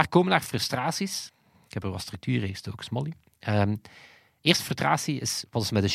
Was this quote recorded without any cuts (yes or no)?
yes